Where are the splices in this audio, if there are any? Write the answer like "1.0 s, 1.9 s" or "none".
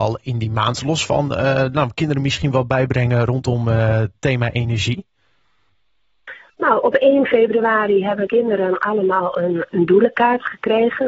8.3 s, 9.7 s